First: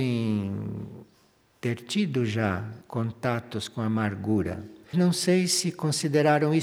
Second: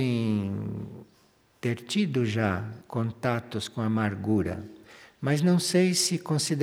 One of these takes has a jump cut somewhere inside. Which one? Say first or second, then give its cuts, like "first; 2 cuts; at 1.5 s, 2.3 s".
first; 1 cut; at 4.9 s